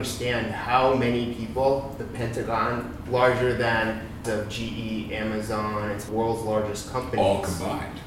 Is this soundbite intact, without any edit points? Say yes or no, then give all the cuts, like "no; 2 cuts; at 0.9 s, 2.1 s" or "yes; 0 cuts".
no; 3 cuts; at 3.1 s, 4.2 s, 6.1 s